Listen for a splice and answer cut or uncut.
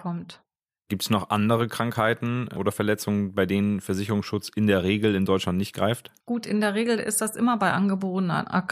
cut